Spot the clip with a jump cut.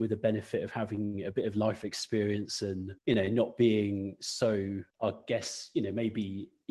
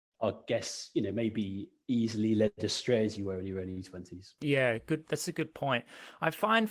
first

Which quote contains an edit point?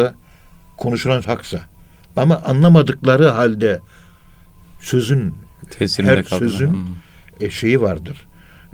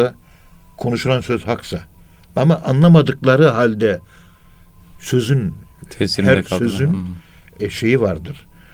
first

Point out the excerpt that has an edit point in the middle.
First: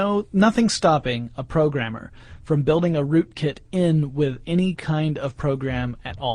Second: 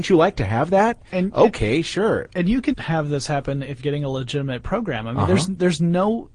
second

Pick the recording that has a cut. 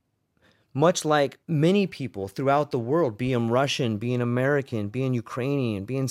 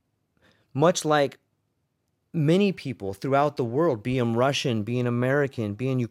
first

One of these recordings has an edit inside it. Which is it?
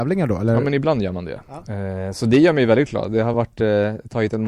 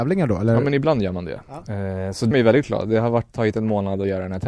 second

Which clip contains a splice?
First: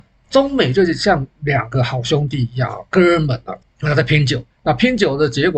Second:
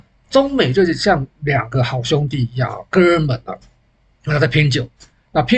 first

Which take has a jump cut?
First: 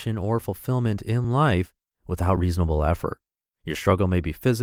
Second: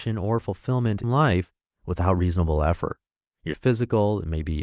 second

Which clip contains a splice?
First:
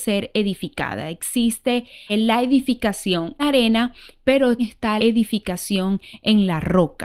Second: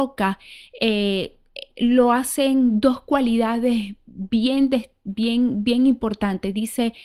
first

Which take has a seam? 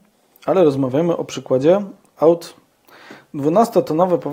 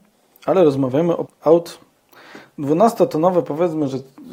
second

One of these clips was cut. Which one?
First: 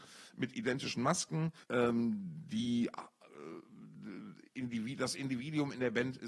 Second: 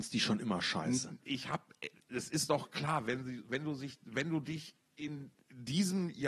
first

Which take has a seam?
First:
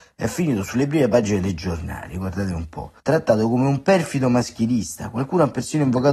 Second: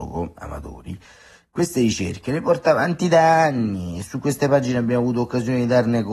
first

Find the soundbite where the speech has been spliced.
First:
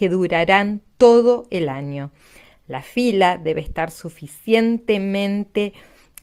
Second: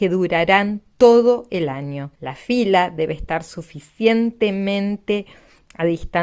second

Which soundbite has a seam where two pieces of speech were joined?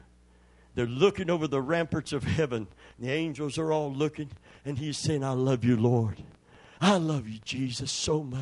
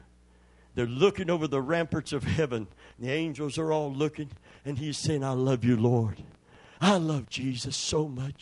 second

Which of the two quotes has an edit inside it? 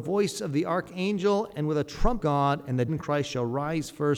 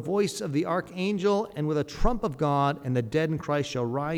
first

